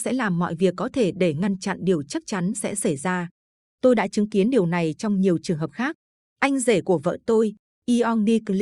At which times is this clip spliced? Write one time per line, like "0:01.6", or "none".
none